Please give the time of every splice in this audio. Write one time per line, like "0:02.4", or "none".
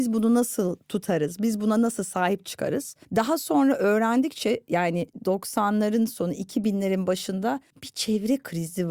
0:03.0
0:07.7

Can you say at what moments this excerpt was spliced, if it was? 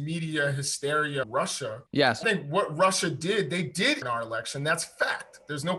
0:01.2
0:01.9
0:02.2
0:04.0

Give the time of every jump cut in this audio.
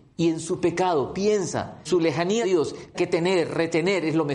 0:01.8
0:02.4
0:02.9

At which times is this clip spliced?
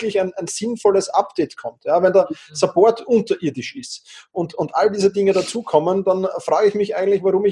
none

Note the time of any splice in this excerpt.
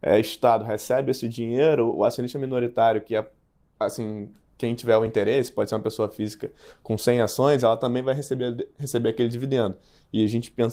none

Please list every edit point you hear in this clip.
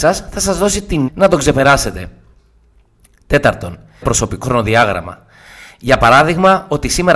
0:01.1
0:04.0
0:04.4

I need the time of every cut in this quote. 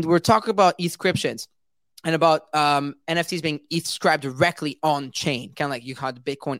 none

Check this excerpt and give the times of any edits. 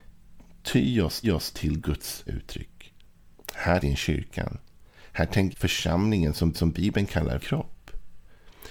0:01.2
0:02.3
0:03.8
0:05.5
0:06.5
0:07.4

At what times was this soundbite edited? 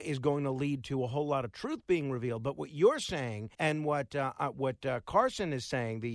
0:03.5

